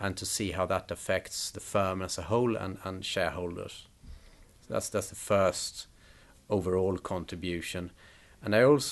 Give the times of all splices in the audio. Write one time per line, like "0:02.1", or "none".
none